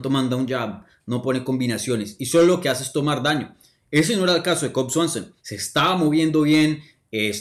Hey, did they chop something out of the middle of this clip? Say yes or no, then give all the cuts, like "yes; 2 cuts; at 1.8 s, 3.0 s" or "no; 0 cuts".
yes; 1 cut; at 5.4 s